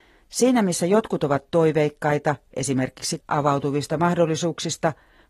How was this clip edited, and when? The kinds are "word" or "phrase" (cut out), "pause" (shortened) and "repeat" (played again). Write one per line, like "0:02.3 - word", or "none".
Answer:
0:03.2 - word